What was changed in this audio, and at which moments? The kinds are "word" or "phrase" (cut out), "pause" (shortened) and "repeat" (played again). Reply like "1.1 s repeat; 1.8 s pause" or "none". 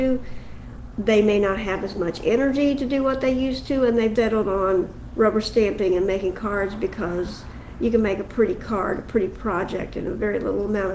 4.2 s word